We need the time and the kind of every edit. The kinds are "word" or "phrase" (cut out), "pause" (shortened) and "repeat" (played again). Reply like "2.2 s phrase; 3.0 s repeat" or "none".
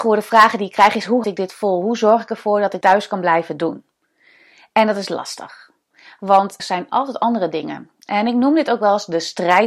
1.2 s word; 2.8 s word; 6.6 s word